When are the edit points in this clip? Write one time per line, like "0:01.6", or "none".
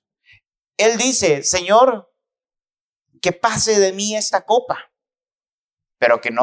none